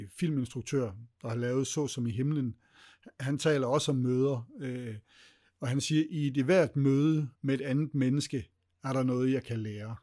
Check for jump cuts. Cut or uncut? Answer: cut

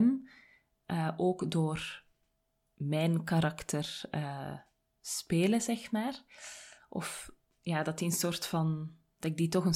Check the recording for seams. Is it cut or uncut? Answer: uncut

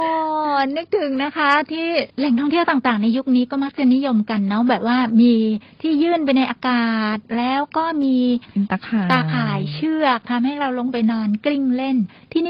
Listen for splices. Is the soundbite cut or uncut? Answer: cut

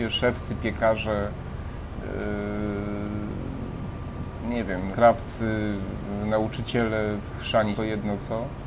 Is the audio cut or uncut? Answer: cut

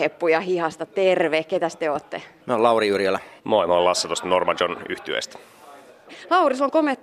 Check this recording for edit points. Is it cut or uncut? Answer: cut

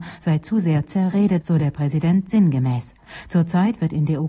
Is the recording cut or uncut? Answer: cut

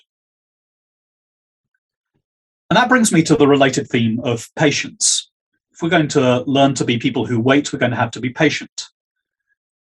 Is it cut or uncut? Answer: uncut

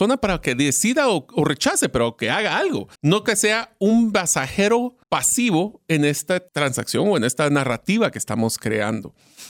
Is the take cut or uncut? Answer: cut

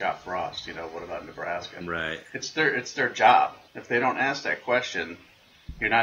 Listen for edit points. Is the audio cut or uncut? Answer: cut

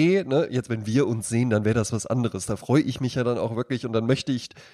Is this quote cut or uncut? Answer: uncut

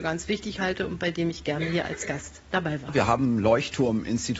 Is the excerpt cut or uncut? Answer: uncut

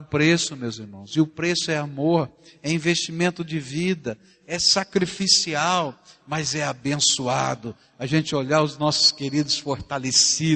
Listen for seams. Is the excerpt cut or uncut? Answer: uncut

